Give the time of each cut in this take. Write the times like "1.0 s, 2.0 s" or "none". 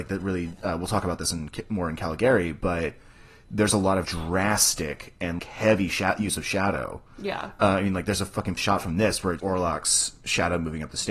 4.0 s, 5.4 s, 8.6 s, 9.4 s